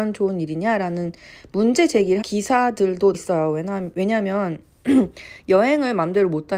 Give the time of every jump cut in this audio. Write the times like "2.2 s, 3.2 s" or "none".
2.2 s, 3.1 s